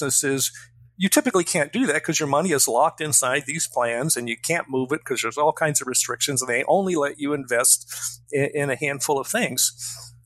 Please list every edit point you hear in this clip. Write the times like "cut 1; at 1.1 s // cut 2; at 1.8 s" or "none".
none